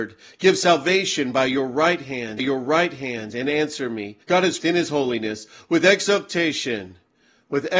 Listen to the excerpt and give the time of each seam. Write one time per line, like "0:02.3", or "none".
0:02.4
0:04.2
0:04.6